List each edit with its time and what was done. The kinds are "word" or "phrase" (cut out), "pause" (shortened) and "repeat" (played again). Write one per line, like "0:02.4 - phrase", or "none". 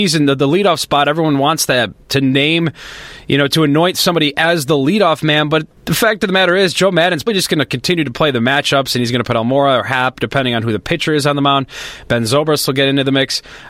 0:05.8 - pause
0:07.3 - word